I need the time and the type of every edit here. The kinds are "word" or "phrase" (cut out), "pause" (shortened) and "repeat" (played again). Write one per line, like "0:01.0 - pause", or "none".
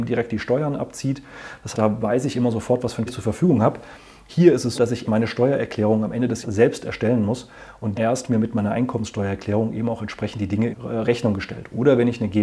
0:01.7 - word
0:03.1 - word
0:04.7 - word
0:05.0 - word
0:06.4 - word
0:07.9 - word
0:08.3 - word
0:10.7 - word